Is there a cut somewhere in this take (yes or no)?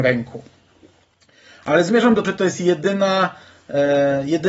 yes